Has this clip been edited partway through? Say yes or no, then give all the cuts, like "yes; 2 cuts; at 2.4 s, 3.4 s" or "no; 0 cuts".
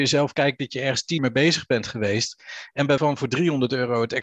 yes; 2 cuts; at 1.2 s, 3.0 s